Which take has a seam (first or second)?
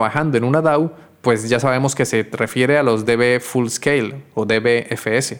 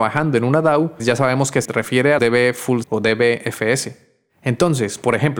second